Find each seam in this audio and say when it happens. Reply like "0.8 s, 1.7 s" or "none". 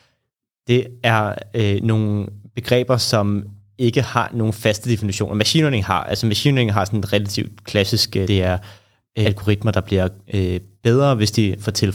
8.3 s, 9.2 s